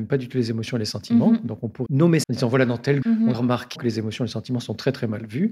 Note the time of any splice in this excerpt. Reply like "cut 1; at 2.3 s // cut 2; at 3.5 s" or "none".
cut 1; at 1.9 s // cut 2; at 2.2 s // cut 3; at 3.0 s // cut 4; at 3.3 s // cut 5; at 3.8 s